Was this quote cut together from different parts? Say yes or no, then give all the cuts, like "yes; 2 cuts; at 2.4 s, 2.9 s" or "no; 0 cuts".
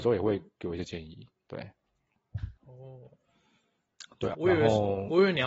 yes; 2 cuts; at 2.6 s, 4.3 s